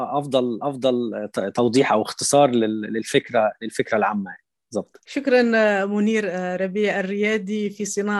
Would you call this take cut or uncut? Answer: uncut